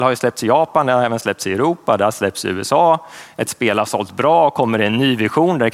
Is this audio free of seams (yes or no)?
yes